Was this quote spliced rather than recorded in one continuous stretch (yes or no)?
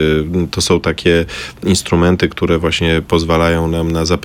no